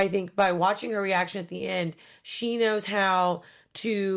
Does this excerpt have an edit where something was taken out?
no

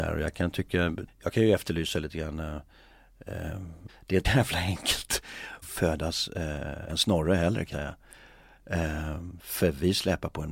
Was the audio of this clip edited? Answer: yes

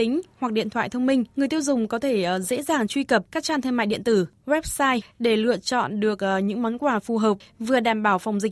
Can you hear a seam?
yes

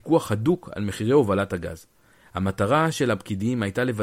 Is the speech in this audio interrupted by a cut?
no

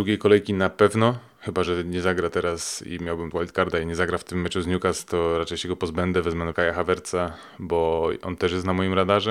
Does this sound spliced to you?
yes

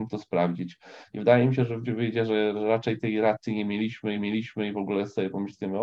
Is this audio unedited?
no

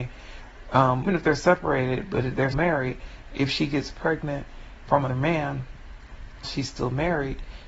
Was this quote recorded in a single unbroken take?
no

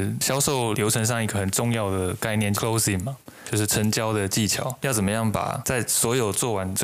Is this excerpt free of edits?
no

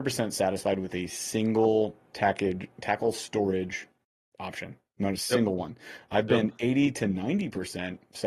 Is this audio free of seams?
yes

